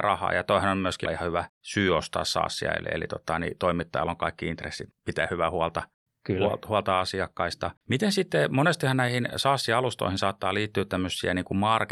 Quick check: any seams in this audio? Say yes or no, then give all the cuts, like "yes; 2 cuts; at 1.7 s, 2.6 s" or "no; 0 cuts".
yes; 3 cuts; at 1.0 s, 4.9 s, 7.8 s